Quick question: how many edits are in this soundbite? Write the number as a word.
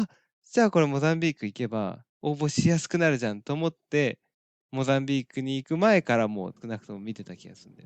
three